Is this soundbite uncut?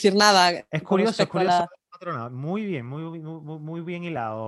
yes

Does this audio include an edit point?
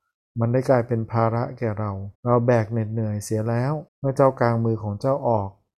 yes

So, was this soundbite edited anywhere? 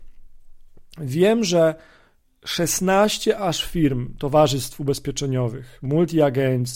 no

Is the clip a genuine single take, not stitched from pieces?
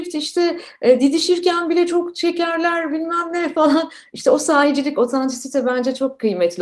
yes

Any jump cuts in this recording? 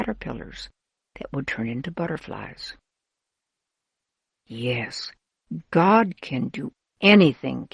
no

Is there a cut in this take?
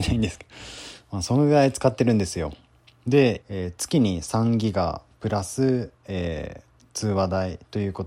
yes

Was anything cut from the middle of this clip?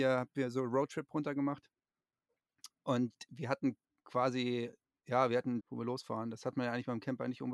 yes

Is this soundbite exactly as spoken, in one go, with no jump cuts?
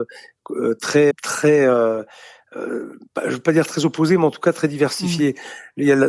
no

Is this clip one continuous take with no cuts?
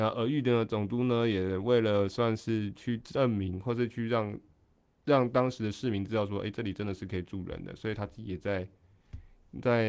yes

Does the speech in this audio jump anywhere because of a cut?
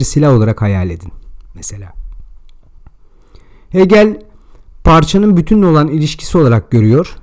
no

